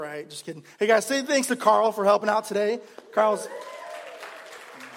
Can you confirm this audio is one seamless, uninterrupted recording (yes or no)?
yes